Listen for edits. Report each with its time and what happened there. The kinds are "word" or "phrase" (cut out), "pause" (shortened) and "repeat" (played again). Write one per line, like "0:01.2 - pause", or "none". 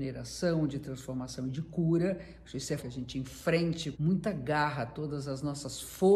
0:02.8 - word
0:03.9 - word